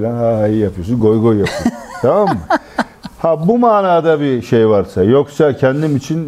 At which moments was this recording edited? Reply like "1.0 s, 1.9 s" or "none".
none

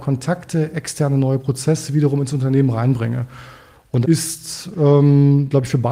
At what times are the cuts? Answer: 4.0 s

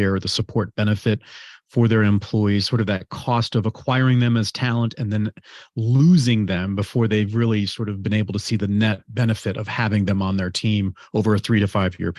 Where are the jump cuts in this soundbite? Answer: none

